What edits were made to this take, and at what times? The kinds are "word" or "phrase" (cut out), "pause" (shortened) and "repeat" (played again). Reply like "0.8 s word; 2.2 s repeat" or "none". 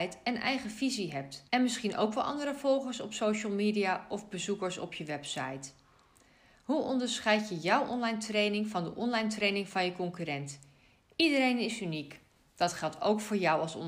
1.5 s pause